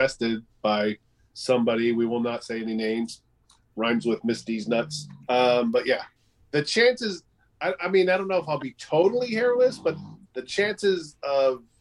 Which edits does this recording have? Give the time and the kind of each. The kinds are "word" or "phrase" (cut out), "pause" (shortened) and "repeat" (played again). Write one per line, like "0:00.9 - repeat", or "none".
0:05.2 - pause
0:06.2 - pause
0:10.3 - pause